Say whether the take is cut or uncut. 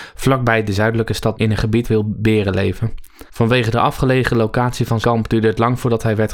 cut